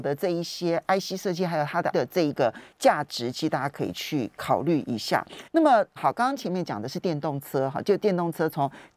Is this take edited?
yes; 3 cuts; at 1.9 s, 5.5 s, 6.0 s

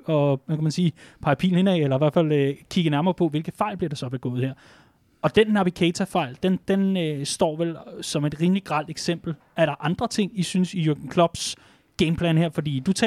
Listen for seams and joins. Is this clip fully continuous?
yes; 0 cuts

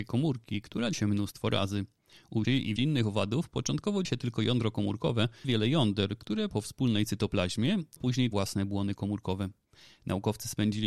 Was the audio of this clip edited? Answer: yes; 8 cuts; at 0.9 s, 2.4 s, 2.8 s, 4.0 s, 5.4 s, 6.5 s, 8.0 s, 8.3 s

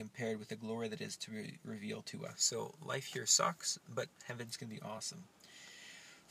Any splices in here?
yes; 1 cut; at 4.1 s

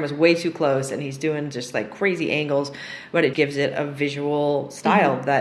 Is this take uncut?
no; 1 cut; at 3.3 s

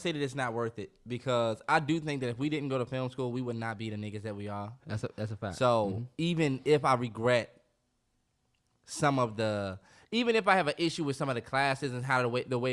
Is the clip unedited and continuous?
yes; 0 cuts

